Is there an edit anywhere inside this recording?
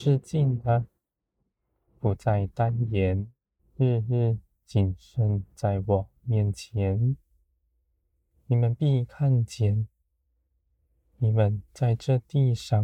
yes; 2 cuts; at 3.6 s, 11.7 s

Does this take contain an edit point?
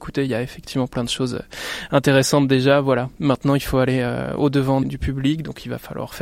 yes; 1 cut; at 4.8 s

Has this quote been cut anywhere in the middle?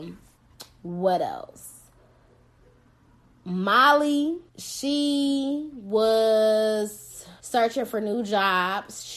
yes; 2 cuts; at 4.5 s, 7.4 s

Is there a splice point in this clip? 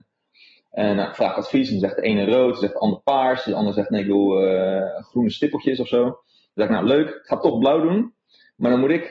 no; 0 cuts

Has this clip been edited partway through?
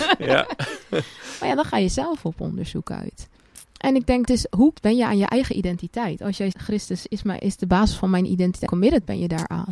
yes; 4 cuts; at 4.2 s, 4.7 s, 6.5 s, 8.7 s

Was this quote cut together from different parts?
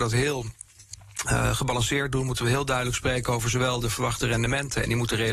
no; 0 cuts

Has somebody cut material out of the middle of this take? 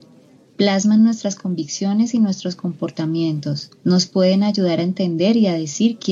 yes; 1 cut; at 3.8 s

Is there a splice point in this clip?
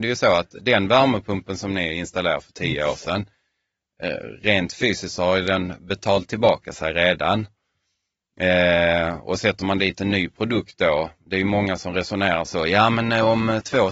no; 0 cuts

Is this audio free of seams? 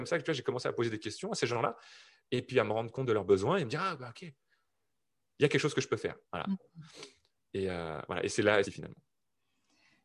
no; 2 cuts; at 6.2 s, 8.6 s

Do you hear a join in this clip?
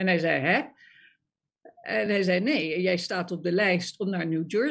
no; 0 cuts

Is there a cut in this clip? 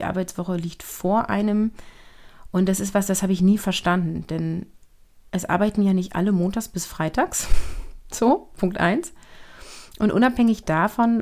no; 0 cuts

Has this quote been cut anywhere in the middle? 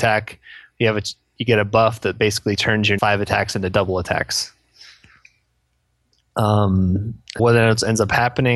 yes; 2 cuts; at 3.0 s, 7.4 s

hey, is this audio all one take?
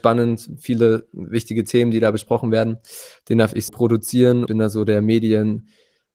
no; 2 cuts; at 3.7 s, 4.5 s

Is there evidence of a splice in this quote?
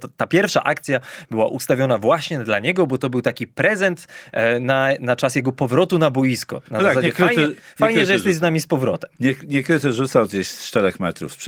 yes; 1 cut; at 6.7 s

